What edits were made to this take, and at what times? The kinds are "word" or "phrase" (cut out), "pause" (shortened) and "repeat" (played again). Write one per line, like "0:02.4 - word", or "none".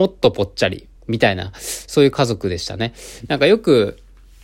0:01.0 - pause